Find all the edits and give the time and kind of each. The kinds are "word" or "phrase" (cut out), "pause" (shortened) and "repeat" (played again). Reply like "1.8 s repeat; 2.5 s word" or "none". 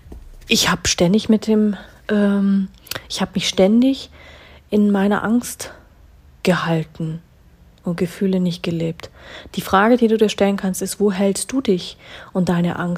none